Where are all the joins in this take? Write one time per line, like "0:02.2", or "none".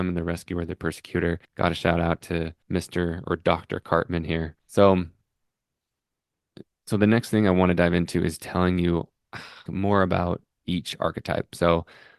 0:01.4
0:02.6
0:04.6
0:09.7